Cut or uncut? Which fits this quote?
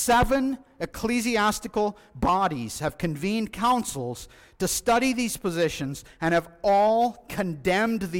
uncut